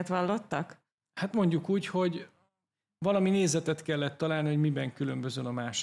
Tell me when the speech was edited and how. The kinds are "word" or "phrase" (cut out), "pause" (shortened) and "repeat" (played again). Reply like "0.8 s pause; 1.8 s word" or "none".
none